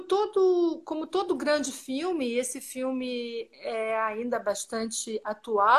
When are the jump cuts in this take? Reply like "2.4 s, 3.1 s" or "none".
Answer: none